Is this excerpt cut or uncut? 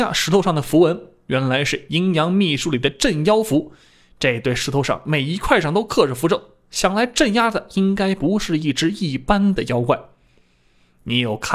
uncut